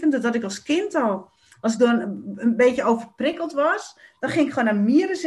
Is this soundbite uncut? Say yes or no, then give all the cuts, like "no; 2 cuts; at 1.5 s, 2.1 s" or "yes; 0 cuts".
yes; 0 cuts